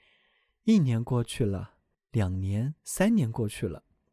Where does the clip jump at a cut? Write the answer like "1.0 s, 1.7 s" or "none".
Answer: 1.9 s, 2.8 s